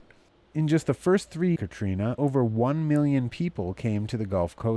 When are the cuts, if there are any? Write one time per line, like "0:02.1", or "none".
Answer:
0:01.6
0:02.2

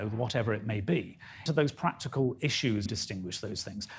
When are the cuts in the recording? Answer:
0:01.5
0:02.9

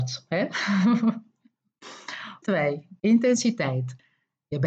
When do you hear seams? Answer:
0:02.4

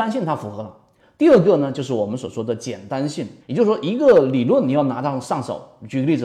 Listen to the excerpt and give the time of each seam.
0:03.4

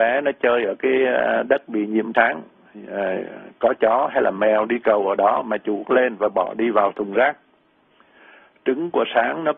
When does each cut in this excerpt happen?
0:02.1
0:05.8

